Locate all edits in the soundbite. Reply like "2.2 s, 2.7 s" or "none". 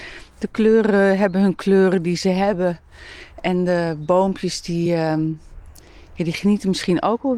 none